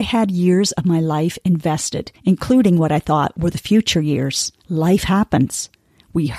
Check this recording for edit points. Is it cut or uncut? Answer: cut